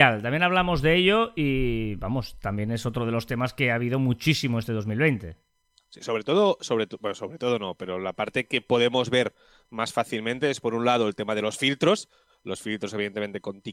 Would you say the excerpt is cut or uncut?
uncut